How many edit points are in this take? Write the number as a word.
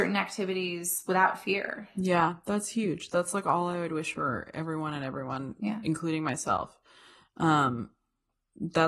zero